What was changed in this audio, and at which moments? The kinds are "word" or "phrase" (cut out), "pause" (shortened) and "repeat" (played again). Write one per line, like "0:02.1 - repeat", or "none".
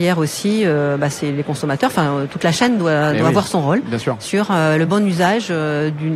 none